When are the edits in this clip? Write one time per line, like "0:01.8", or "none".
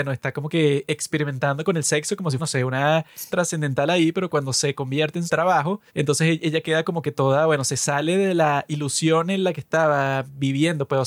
0:02.4
0:03.3
0:05.3
0:05.9